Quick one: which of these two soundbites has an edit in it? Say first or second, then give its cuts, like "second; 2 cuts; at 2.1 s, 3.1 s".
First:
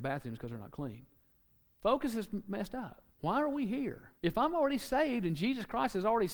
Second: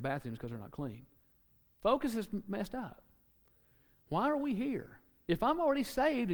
first; 2 cuts; at 3.1 s, 4.1 s